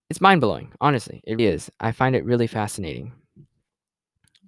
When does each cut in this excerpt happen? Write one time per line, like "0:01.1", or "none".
0:01.4